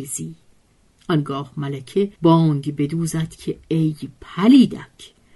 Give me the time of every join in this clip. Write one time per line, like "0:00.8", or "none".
0:02.2

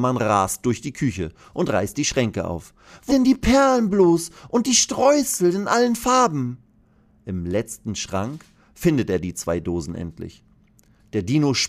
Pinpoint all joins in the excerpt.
0:03.1

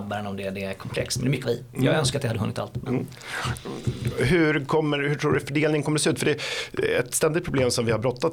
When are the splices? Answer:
0:01.4

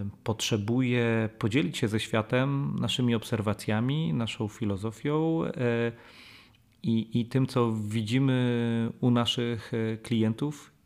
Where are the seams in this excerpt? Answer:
none

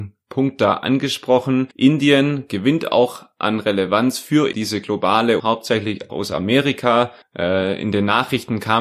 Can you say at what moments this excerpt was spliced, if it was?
0:01.7
0:04.5
0:05.4
0:06.1
0:07.2

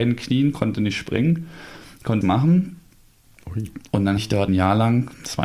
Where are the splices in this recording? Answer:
0:02.2
0:04.2
0:04.5

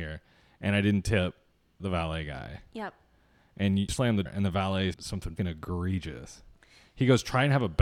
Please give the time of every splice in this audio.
0:01.8
0:03.9
0:04.3
0:04.9
0:05.4

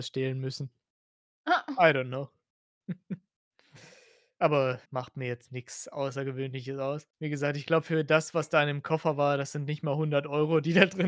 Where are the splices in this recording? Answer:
0:04.9
0:07.1

